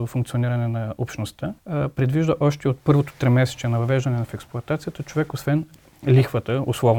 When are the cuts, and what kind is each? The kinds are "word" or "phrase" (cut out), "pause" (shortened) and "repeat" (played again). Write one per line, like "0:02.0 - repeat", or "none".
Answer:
0:01.6 - pause

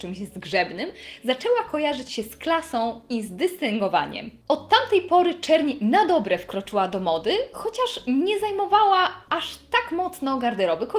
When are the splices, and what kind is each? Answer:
none

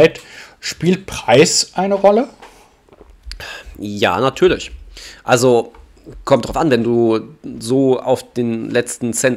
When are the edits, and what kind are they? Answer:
none

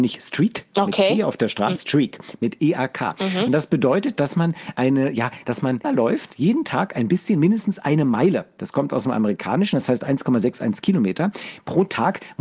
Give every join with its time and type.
0:01.8 - word
0:05.8 - word

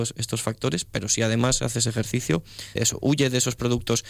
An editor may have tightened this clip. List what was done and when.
0:02.8 - word

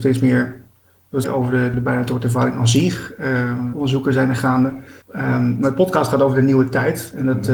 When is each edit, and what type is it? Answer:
0:01.2 - phrase
0:01.7 - word
0:03.7 - word
0:05.0 - pause

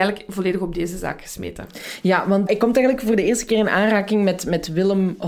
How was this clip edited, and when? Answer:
0:02.5 - word

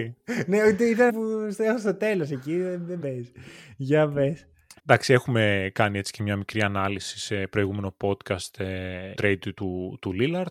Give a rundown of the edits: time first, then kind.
0:01.1 - word
0:03.0 - phrase
0:04.8 - pause
0:09.1 - phrase

